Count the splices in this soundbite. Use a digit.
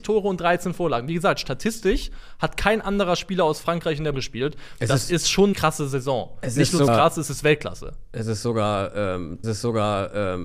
4